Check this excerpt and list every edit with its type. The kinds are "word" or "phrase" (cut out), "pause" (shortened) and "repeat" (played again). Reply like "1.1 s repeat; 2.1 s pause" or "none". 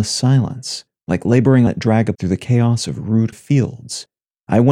1.7 s word; 2.1 s word; 3.3 s word